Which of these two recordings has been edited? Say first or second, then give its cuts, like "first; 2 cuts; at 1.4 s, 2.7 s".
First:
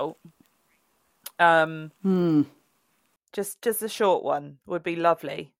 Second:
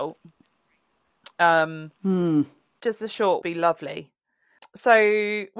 second; 2 cuts; at 2.8 s, 3.4 s